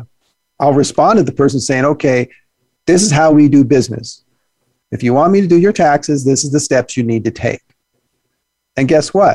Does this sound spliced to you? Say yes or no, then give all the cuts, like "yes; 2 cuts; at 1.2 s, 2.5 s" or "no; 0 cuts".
no; 0 cuts